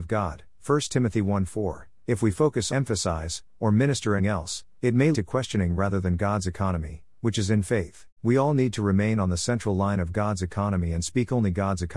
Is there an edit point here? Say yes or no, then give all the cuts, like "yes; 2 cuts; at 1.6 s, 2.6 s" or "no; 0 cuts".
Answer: yes; 4 cuts; at 2.7 s, 4.2 s, 5.1 s, 8.2 s